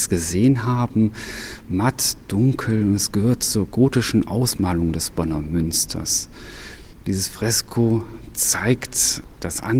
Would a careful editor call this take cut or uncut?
uncut